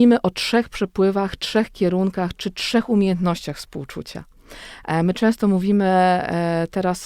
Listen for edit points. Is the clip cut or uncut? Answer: uncut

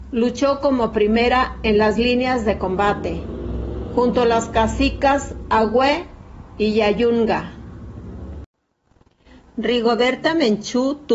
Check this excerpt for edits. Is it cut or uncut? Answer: uncut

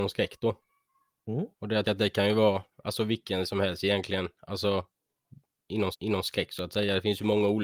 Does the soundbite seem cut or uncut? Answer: cut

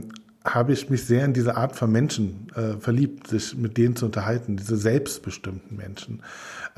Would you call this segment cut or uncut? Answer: uncut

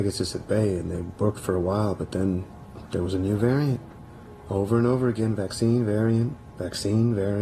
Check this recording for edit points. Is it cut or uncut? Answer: uncut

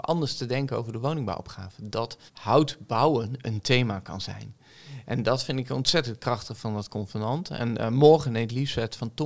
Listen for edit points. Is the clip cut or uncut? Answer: cut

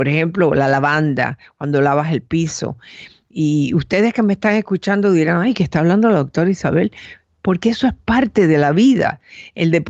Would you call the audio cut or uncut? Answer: uncut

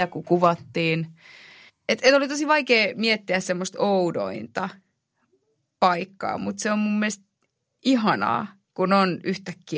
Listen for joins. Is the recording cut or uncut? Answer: uncut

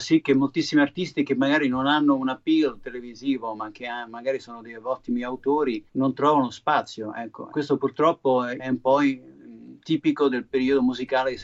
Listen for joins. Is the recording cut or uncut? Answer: cut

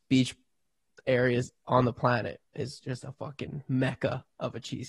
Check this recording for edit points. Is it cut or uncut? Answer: cut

